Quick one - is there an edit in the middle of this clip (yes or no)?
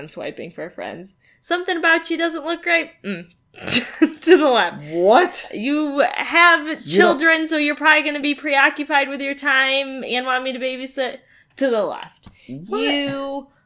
no